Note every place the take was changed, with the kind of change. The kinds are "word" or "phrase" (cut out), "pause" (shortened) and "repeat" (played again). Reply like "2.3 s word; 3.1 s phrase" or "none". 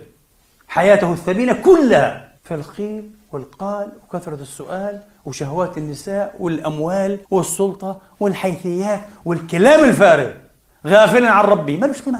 2.4 s pause; 7.2 s pause

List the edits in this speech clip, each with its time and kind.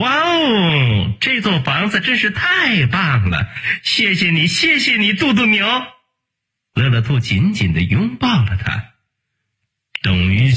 none

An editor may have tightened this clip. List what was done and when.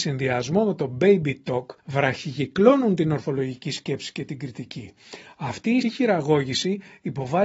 1.8 s pause; 5.8 s word

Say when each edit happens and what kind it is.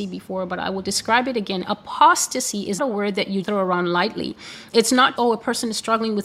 2.8 s word; 3.4 s word; 5.2 s word

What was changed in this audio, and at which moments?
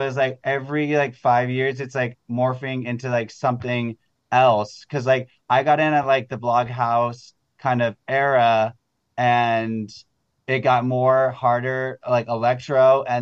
none

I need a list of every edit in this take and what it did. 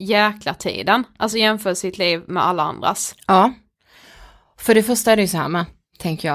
none

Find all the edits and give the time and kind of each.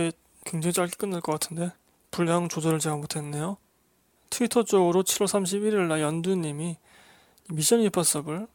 none

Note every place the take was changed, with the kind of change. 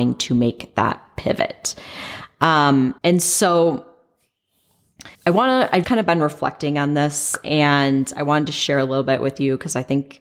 3.0 s pause; 5.1 s pause; 5.8 s word

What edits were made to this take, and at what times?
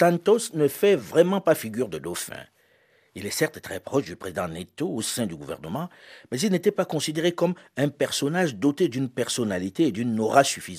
none

